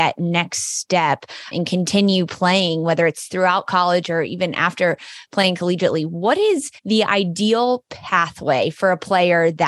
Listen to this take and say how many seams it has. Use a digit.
2